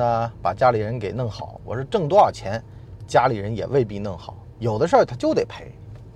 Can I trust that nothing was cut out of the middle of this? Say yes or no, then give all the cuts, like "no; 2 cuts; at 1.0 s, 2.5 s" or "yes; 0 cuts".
no; 1 cut; at 4.5 s